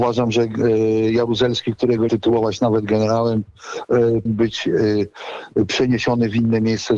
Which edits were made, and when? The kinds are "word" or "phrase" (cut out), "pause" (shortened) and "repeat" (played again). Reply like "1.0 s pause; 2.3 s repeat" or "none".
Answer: 2.1 s phrase; 4.3 s word